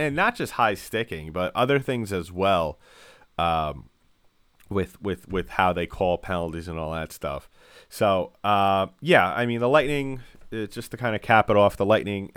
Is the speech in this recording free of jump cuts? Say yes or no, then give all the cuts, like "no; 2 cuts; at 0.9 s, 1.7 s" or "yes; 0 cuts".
yes; 0 cuts